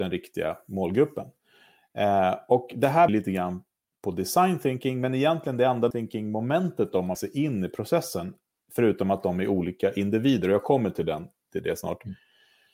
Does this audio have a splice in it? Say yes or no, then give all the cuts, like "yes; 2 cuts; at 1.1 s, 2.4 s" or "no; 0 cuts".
yes; 3 cuts; at 3.1 s, 5.9 s, 7.1 s